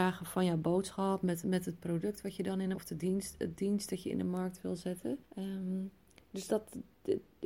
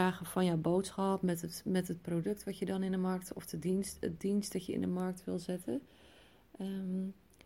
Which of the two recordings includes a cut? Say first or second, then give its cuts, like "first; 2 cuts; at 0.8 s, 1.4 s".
first; 4 cuts; at 1.4 s, 2.7 s, 5.2 s, 6.5 s